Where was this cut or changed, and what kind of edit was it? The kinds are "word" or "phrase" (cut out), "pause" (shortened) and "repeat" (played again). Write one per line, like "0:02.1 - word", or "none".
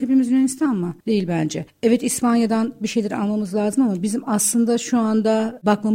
0:01.0 - pause